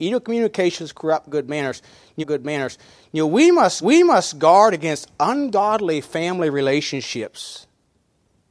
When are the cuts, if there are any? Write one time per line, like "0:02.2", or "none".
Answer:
0:02.2
0:03.8